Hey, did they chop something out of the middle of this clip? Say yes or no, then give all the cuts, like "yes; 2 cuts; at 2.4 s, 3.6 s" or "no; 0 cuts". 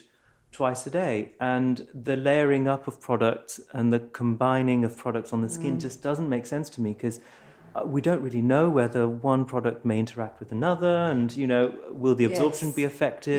no; 0 cuts